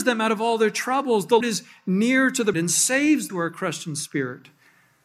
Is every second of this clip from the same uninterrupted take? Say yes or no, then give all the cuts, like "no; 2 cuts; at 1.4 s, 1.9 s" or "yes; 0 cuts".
no; 3 cuts; at 1.4 s, 2.5 s, 3.3 s